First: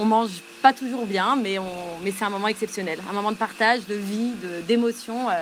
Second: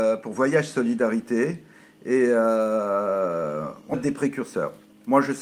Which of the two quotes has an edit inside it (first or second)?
second